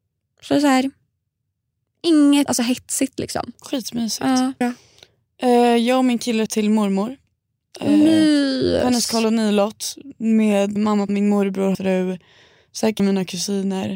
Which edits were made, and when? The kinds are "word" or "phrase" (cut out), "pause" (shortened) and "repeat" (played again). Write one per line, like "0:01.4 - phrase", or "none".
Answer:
0:02.5 - word
0:04.6 - word
0:06.5 - word
0:10.8 - word
0:11.1 - word
0:11.7 - word
0:13.0 - word